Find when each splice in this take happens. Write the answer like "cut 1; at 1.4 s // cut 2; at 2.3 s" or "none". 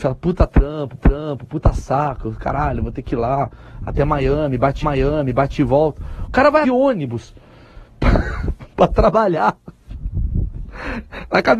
cut 1; at 1.0 s // cut 2; at 4.8 s // cut 3; at 6.6 s // cut 4; at 7.9 s